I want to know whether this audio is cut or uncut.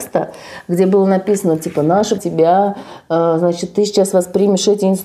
cut